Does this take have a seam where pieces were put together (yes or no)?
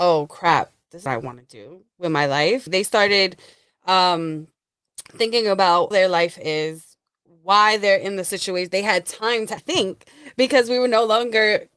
yes